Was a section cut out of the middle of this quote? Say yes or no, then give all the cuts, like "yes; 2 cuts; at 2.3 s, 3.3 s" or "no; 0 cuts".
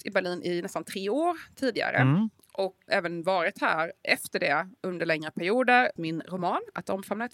yes; 3 cuts; at 2.9 s, 4.8 s, 6.0 s